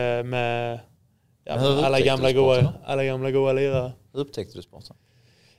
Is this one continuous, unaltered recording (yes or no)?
yes